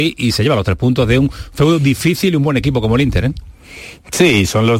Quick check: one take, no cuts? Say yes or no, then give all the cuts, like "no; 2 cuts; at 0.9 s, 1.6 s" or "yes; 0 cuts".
yes; 0 cuts